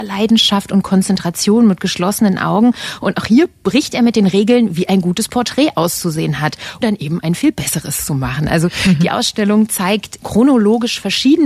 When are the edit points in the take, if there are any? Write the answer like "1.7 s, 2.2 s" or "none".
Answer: 6.8 s, 10.2 s